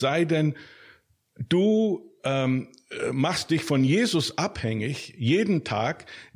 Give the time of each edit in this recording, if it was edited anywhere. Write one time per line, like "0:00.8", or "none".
none